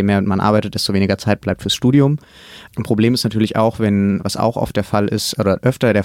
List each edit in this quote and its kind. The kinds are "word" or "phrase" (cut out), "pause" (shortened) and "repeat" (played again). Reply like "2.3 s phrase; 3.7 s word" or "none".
2.7 s pause